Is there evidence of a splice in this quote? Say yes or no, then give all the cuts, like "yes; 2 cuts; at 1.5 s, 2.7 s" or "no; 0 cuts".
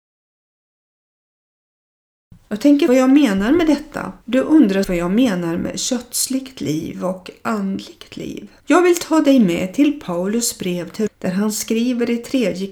yes; 5 cuts; at 2.9 s, 4.2 s, 4.8 s, 8.6 s, 11.1 s